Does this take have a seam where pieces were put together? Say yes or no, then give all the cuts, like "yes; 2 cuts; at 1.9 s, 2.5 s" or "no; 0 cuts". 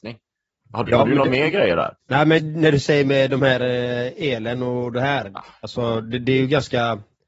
yes; 2 cuts; at 2.0 s, 2.4 s